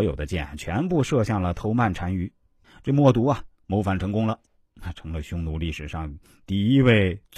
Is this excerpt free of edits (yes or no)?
yes